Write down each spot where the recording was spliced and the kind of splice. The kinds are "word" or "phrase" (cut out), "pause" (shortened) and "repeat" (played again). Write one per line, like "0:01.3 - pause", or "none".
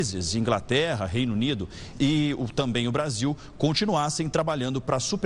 0:01.9 - word